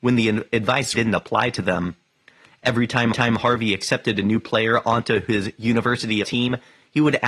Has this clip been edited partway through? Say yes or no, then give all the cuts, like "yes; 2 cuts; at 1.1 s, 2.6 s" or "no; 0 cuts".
yes; 3 cuts; at 0.9 s, 3.1 s, 6.2 s